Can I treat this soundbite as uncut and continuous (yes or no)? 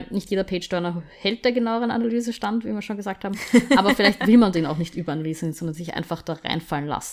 yes